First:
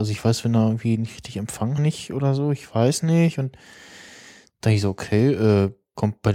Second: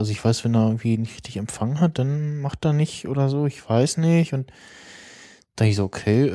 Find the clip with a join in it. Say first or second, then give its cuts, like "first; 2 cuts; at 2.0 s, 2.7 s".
first; 1 cut; at 1.8 s